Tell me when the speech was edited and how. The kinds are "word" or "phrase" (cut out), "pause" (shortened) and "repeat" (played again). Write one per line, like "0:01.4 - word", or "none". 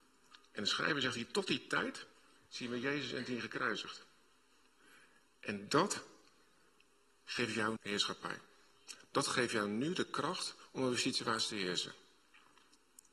0:07.8 - word